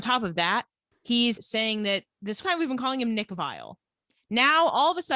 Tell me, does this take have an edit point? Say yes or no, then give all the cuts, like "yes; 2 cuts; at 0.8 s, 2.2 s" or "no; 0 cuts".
yes; 2 cuts; at 1.4 s, 2.4 s